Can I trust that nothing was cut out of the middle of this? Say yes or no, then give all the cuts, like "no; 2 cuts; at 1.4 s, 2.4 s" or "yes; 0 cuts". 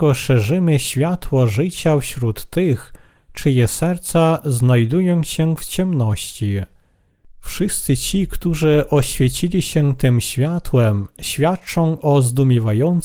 yes; 0 cuts